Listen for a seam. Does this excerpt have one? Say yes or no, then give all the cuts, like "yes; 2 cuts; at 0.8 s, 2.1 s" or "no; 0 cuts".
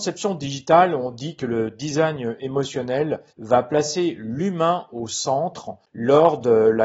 yes; 1 cut; at 3.3 s